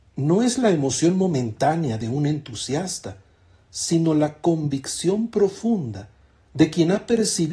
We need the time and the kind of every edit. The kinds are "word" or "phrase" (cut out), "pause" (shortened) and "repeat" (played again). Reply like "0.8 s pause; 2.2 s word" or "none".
none